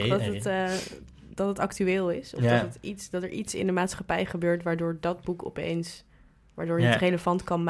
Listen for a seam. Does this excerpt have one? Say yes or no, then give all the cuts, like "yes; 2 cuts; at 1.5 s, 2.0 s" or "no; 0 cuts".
no; 0 cuts